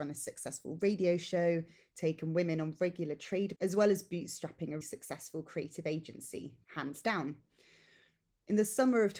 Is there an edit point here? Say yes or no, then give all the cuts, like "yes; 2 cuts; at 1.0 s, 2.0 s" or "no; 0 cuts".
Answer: yes; 3 cuts; at 3.6 s, 4.8 s, 6.6 s